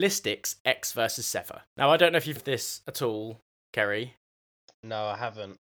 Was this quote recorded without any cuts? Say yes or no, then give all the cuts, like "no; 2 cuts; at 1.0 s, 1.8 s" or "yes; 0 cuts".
no; 2 cuts; at 1.7 s, 2.4 s